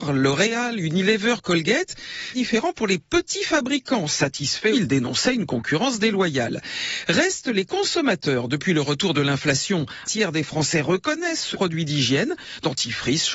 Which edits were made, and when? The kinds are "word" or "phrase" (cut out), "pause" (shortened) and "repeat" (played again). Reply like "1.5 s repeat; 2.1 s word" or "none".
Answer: 2.3 s phrase; 4.7 s word; 10.0 s word; 11.5 s phrase